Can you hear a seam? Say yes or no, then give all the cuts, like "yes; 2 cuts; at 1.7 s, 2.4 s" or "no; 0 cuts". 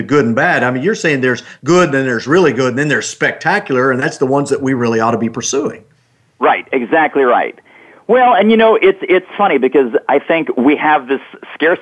no; 0 cuts